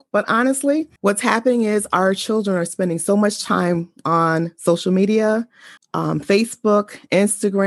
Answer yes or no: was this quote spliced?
yes